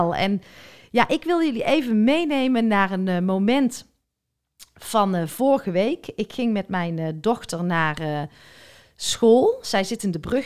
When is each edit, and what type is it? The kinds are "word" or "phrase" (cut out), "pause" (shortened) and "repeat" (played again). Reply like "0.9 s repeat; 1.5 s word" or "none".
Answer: none